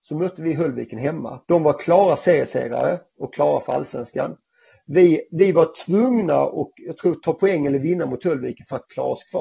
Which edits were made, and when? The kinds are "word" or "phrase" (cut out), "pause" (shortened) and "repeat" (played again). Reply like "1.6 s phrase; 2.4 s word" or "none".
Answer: 1.4 s pause